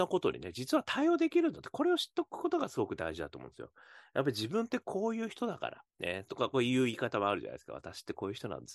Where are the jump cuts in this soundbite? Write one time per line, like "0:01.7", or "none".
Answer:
0:05.9